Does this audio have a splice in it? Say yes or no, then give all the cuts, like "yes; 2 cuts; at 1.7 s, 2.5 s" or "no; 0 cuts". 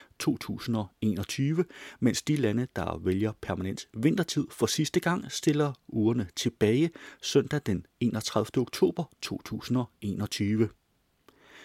no; 0 cuts